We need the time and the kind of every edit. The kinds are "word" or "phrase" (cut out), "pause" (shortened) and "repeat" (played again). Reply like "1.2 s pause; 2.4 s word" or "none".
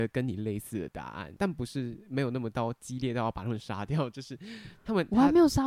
1.4 s word